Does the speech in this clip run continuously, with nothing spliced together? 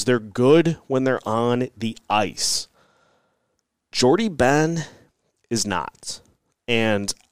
yes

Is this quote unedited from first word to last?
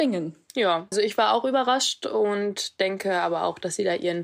no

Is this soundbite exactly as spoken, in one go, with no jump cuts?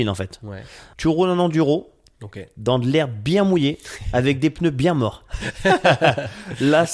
yes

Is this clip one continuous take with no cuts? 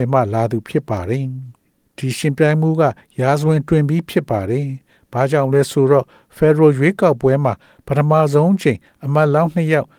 yes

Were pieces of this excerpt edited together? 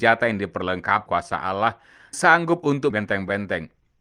yes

